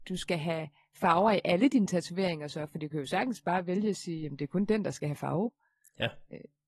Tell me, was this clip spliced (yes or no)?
no